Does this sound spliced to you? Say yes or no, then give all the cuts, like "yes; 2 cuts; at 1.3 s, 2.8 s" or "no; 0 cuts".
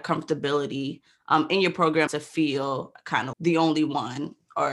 yes; 2 cuts; at 2.1 s, 3.3 s